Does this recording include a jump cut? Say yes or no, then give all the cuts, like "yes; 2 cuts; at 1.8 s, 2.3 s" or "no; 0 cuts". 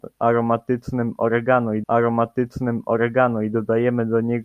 yes; 1 cut; at 1.8 s